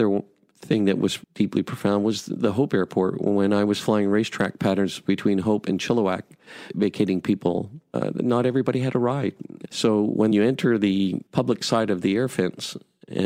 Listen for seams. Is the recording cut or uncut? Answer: cut